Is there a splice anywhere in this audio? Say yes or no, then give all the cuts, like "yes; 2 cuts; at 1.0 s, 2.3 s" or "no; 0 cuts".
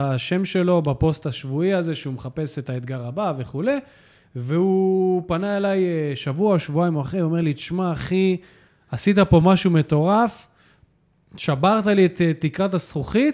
no; 0 cuts